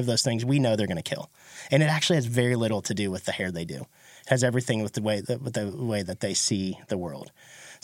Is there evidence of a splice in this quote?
no; 0 cuts

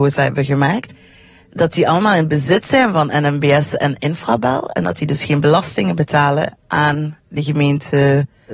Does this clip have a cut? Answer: no; 0 cuts

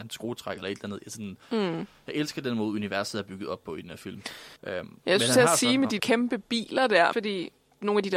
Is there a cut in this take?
yes; 4 cuts; at 1.4 s, 4.6 s, 6.0 s, 7.1 s

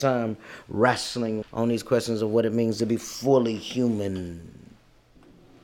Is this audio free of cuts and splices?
no; 1 cut; at 1.4 s

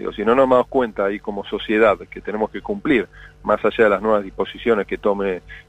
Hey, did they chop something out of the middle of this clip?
no; 0 cuts

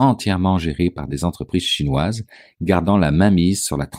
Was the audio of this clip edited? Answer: no; 0 cuts

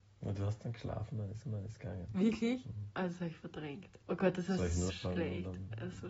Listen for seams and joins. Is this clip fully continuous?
no; 3 cuts; at 1.4 s, 4.0 s, 4.9 s

